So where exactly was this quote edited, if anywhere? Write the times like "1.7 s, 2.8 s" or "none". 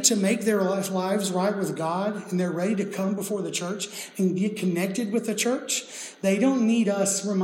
none